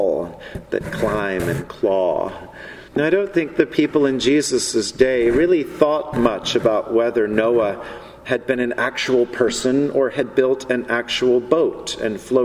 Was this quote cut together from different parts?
yes; 1 cut; at 2.9 s

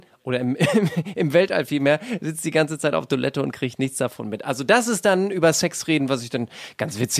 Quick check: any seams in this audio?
no; 0 cuts

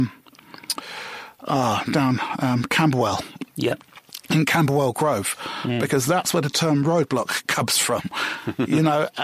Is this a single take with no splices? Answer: yes; 0 cuts

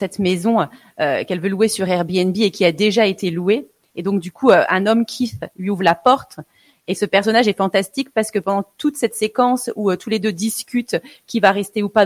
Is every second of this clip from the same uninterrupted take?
yes; 0 cuts

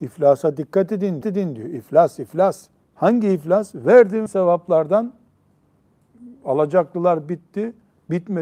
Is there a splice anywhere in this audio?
yes; 3 cuts; at 1.2 s, 2.8 s, 4.3 s

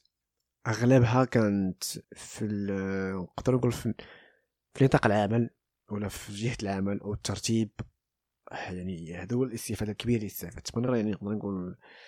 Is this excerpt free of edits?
no; 2 cuts; at 2.0 s, 10.9 s

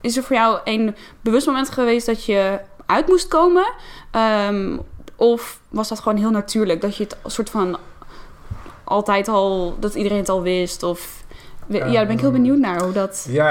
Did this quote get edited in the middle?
no; 0 cuts

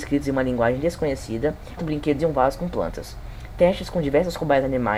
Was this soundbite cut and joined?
yes; 2 cuts; at 1.8 s, 2.2 s

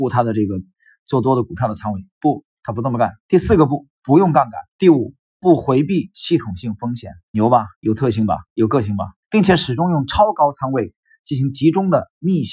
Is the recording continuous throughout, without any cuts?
no; 6 cuts; at 3.2 s, 4.7 s, 7.2 s, 7.7 s, 8.5 s, 9.2 s

